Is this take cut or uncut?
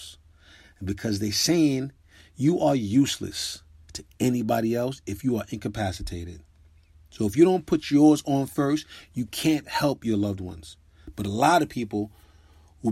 uncut